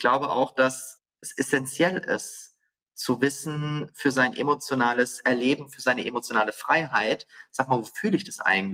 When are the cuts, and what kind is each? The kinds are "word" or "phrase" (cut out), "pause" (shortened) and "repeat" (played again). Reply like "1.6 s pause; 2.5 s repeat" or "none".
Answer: none